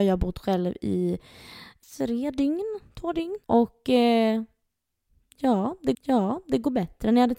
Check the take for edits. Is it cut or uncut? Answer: cut